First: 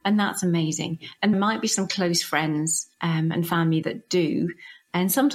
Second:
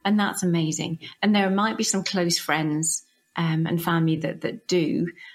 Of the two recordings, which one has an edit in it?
first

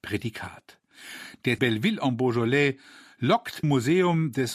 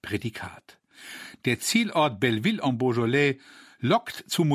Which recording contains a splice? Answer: first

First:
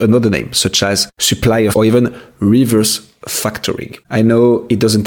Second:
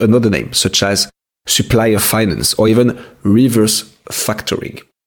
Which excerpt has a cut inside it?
first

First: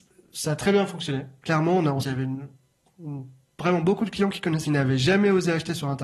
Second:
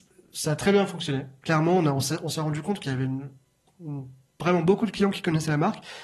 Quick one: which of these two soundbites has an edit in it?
first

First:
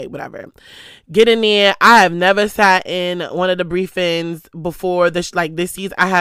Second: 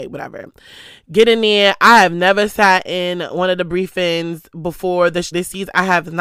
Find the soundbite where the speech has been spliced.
second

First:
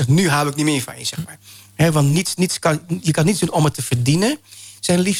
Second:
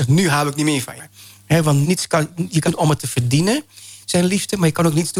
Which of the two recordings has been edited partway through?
second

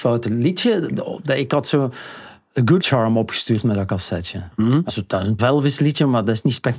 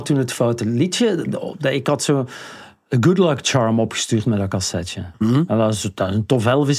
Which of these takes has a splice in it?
first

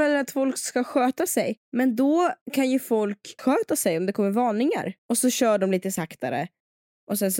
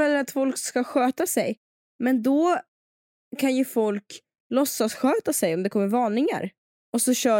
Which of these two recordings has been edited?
first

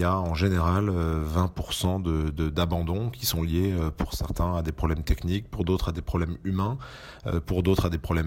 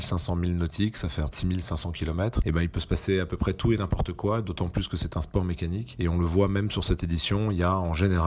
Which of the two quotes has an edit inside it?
second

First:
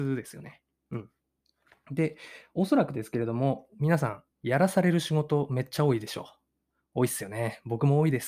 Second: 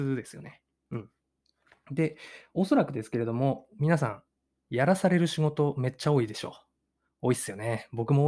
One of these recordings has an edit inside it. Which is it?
first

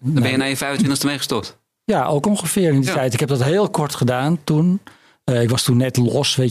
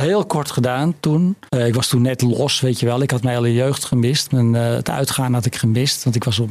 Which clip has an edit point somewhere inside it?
second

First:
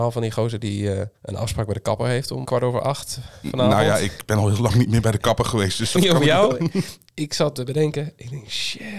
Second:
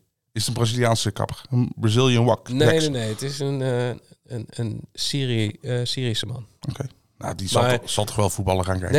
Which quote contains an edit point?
first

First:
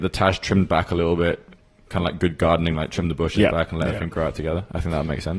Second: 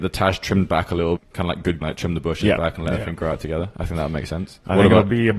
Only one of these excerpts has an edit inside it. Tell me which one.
second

